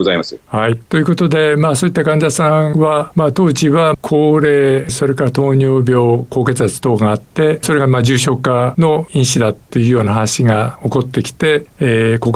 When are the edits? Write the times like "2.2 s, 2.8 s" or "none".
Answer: none